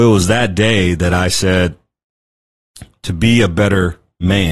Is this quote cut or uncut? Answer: uncut